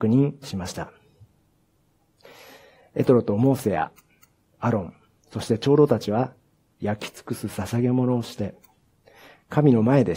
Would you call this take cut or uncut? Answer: uncut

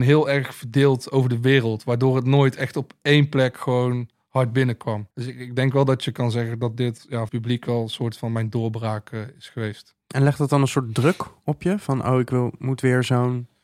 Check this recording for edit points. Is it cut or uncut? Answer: cut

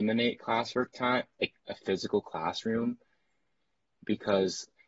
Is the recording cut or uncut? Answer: cut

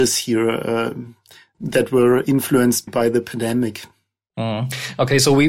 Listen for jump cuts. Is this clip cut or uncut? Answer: cut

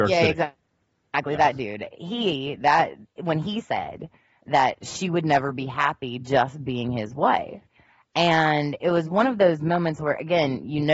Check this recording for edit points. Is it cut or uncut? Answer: uncut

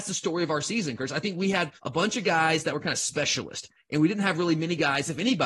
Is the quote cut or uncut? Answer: cut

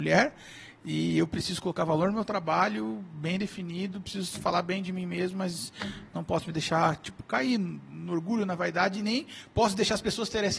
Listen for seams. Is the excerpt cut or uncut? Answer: uncut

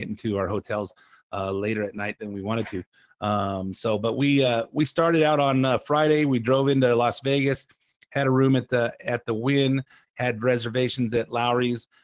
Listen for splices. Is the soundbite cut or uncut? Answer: uncut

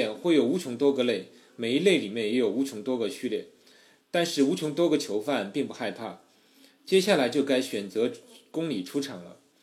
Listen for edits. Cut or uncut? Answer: uncut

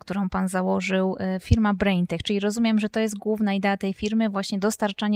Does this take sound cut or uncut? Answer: uncut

